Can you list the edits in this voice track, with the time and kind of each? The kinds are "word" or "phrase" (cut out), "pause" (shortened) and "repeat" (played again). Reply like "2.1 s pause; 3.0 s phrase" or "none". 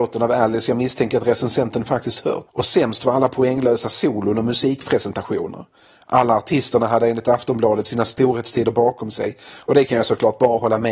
none